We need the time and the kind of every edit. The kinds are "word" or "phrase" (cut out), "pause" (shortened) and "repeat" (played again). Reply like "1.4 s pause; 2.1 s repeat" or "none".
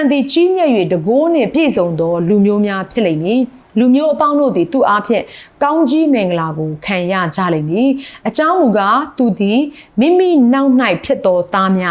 3.7 s pause